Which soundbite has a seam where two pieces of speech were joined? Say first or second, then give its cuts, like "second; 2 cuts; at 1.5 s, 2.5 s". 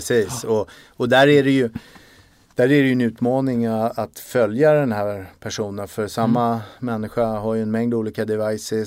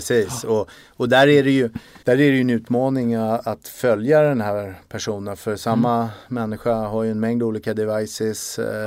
second; 1 cut; at 2.0 s